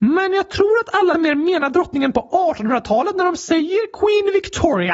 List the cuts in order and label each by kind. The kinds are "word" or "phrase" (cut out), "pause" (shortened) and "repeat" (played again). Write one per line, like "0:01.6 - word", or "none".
0:01.1 - word